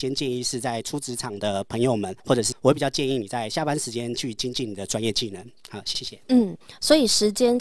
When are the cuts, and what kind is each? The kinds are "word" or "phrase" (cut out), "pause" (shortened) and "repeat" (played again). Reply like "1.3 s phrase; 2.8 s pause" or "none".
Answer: 2.2 s pause; 2.5 s word; 6.2 s pause